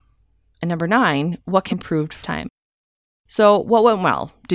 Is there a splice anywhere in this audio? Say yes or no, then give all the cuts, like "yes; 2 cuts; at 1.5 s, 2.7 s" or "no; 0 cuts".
yes; 2 cuts; at 1.7 s, 2.2 s